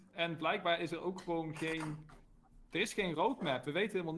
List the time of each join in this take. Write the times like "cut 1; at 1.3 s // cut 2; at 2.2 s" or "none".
none